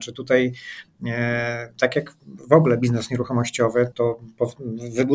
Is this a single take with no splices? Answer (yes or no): no